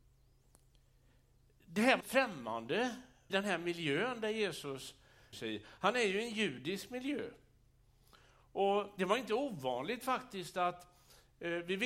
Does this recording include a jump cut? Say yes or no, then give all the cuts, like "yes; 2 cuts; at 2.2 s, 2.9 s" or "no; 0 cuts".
yes; 4 cuts; at 2.0 s, 3.3 s, 5.3 s, 9.0 s